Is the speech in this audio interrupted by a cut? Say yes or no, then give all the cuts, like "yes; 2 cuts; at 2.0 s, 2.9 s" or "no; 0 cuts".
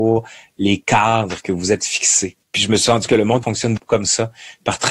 yes; 4 cuts; at 2.4 s, 3.1 s, 3.4 s, 3.8 s